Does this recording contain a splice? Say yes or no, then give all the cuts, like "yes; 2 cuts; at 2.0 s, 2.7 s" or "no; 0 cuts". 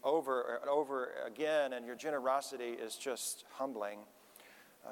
no; 0 cuts